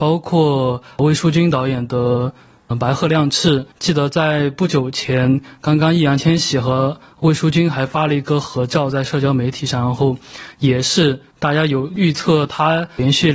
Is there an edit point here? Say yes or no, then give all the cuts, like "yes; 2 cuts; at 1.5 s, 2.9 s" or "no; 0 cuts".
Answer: yes; 2 cuts; at 2.7 s, 3.7 s